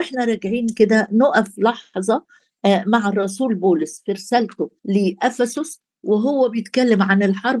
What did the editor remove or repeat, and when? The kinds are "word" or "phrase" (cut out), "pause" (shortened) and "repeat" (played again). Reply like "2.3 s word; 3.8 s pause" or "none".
4.8 s pause

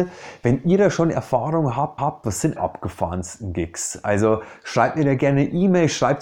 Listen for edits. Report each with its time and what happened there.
2.0 s repeat; 2.6 s phrase

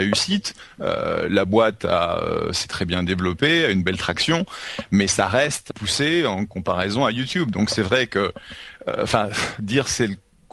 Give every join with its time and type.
5.7 s phrase

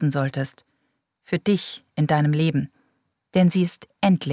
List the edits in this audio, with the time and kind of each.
none

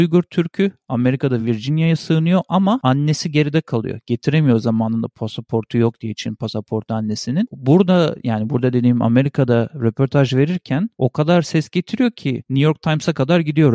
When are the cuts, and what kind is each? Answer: none

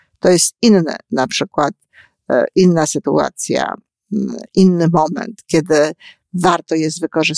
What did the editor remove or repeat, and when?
none

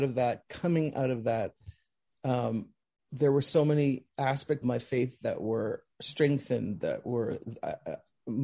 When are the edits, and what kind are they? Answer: 4.6 s word; 5.9 s pause

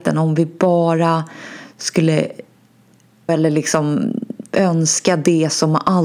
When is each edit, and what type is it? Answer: 3.3 s word

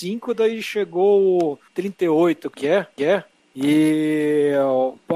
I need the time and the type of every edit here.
1.7 s pause; 2.5 s phrase; 3.0 s repeat

